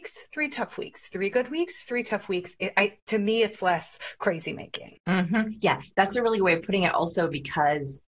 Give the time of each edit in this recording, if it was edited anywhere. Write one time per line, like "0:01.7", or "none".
0:05.0